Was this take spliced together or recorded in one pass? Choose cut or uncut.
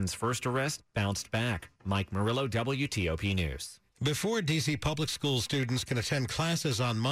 uncut